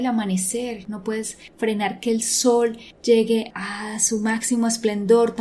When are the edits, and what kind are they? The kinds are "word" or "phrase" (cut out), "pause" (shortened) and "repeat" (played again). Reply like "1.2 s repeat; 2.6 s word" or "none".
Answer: 3.5 s word